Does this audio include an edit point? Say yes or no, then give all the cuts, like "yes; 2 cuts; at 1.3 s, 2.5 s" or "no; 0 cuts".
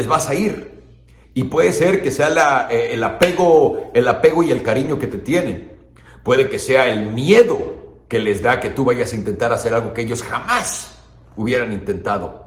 no; 0 cuts